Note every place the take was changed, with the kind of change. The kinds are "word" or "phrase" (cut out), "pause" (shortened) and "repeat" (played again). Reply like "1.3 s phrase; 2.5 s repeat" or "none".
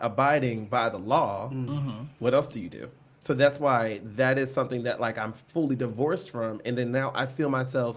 none